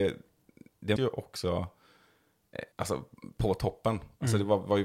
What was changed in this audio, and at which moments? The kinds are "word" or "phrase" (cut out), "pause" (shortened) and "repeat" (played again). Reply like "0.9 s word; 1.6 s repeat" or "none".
1.0 s word; 2.7 s pause